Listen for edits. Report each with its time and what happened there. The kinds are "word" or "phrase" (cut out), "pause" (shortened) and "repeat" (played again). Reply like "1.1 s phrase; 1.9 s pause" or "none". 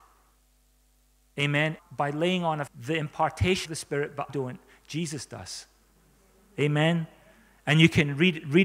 1.8 s word; 2.7 s word; 3.7 s word; 4.3 s word